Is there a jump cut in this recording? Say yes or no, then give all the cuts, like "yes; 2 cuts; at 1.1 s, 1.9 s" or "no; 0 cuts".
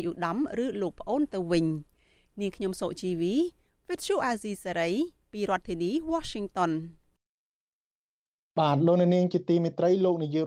no; 0 cuts